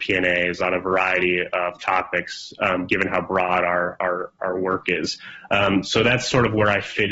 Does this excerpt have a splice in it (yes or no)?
no